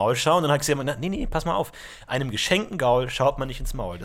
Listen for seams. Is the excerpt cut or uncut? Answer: uncut